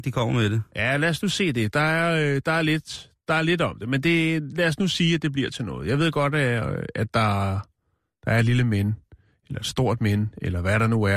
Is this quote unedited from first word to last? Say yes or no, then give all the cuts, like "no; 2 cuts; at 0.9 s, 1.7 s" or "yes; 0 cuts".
yes; 0 cuts